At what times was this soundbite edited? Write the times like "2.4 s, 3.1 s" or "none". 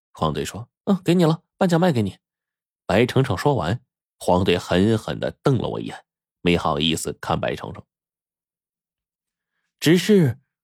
none